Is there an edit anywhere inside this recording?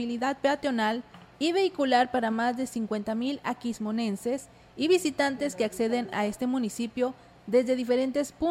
no; 0 cuts

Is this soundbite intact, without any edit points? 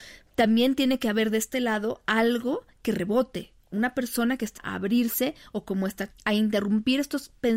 no; 2 cuts; at 4.6 s, 6.1 s

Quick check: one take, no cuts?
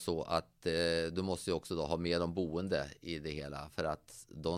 yes; 0 cuts

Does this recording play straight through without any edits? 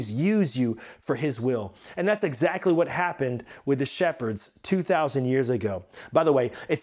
yes; 0 cuts

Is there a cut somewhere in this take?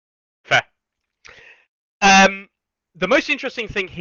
no; 0 cuts

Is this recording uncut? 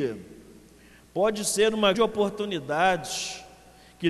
no; 1 cut; at 1.9 s

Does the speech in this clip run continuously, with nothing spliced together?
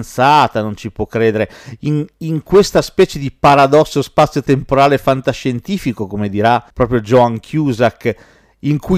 no; 1 cut; at 6.7 s

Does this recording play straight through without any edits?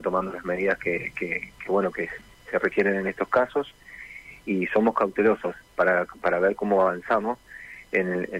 yes; 0 cuts

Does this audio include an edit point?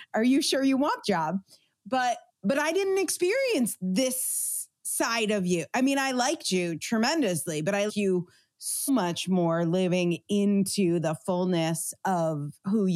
yes; 4 cuts; at 1.0 s, 2.3 s, 7.9 s, 8.9 s

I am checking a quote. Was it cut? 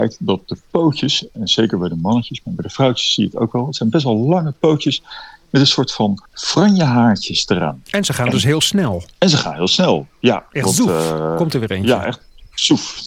yes; 2 cuts; at 6.3 s, 9.1 s

